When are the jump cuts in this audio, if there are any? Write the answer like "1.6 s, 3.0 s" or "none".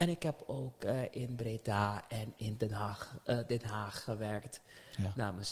none